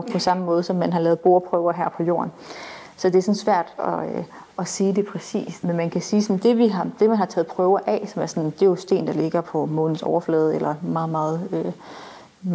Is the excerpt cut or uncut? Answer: uncut